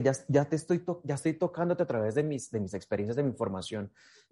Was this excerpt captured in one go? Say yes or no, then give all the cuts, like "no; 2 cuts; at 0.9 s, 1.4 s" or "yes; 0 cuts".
yes; 0 cuts